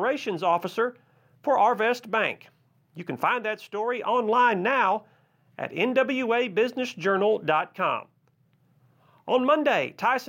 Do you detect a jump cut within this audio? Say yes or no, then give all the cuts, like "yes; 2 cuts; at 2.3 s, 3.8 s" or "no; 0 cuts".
no; 0 cuts